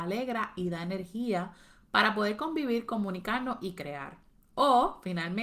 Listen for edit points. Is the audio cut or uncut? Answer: uncut